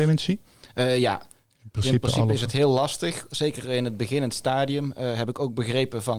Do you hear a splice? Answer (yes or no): no